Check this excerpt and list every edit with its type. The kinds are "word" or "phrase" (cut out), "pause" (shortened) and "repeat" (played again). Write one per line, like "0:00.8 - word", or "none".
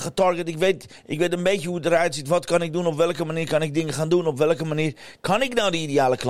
none